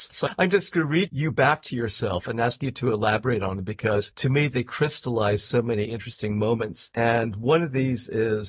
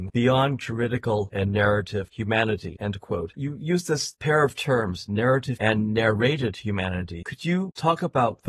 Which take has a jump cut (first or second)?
second